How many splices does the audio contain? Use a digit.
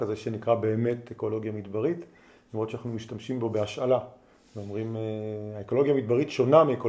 0